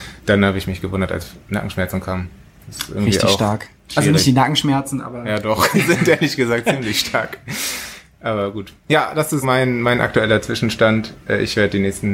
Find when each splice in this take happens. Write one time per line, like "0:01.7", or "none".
0:03.8
0:05.7
0:08.8
0:09.4